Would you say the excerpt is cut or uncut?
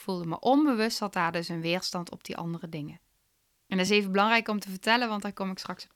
uncut